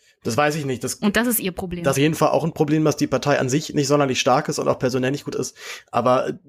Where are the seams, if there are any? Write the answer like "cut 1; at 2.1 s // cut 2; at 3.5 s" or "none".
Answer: cut 1; at 1.9 s // cut 2; at 5.3 s